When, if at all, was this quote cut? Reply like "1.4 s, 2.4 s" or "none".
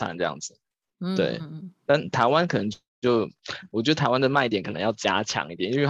none